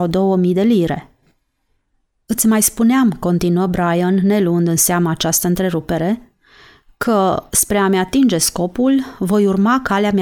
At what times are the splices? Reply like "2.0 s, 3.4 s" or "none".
none